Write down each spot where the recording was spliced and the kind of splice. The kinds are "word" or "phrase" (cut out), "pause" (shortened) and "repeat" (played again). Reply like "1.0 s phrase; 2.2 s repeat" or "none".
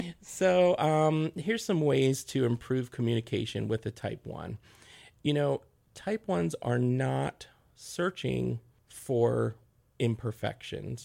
none